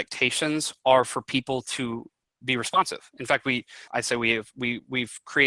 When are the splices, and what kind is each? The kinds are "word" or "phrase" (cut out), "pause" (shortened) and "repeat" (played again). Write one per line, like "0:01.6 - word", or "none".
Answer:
0:02.4 - word
0:03.9 - pause